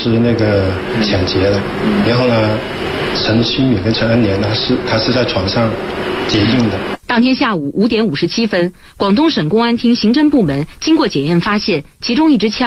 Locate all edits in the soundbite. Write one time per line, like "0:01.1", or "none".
0:03.1
0:07.0